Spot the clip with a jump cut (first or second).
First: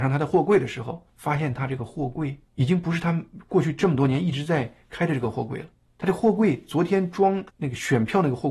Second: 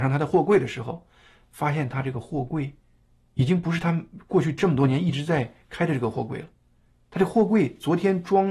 first